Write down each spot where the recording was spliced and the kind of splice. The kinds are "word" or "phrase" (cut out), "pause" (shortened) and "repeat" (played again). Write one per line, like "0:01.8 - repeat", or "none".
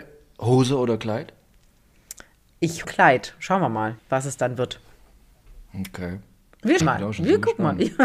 0:02.8 - word
0:04.0 - pause
0:05.7 - pause
0:06.8 - word